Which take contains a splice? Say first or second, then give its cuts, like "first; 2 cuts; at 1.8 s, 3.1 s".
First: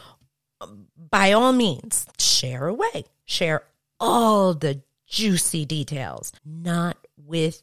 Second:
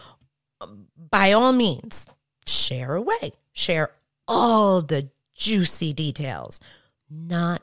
first; 2 cuts; at 2.1 s, 6.4 s